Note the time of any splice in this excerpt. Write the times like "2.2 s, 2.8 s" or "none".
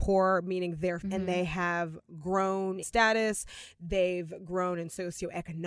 1.0 s, 2.8 s